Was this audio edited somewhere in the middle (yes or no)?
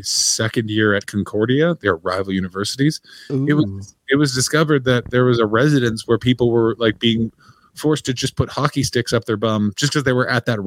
no